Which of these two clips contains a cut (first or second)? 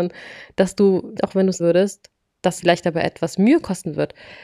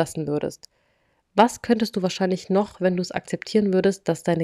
first